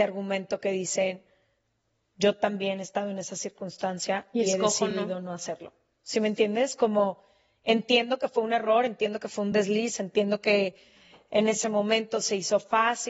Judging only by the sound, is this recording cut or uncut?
uncut